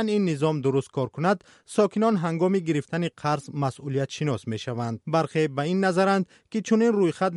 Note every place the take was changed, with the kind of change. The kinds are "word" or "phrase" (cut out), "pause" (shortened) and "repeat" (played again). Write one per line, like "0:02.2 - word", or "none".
none